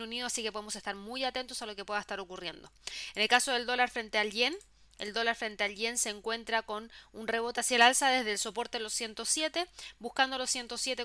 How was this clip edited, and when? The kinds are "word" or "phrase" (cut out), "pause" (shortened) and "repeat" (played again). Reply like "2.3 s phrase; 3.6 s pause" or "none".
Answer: none